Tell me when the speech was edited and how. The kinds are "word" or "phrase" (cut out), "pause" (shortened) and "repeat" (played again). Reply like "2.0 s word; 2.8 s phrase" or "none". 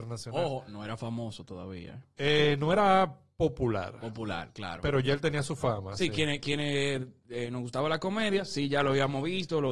none